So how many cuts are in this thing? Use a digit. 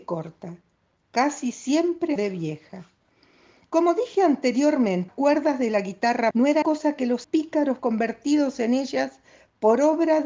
6